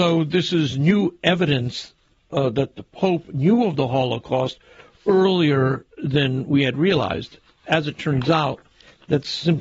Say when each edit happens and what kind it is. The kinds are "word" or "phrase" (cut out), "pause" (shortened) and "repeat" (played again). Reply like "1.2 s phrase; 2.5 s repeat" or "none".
none